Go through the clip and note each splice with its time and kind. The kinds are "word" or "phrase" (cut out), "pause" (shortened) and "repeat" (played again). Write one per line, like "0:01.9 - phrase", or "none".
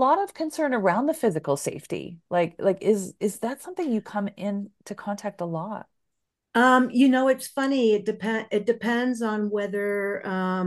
none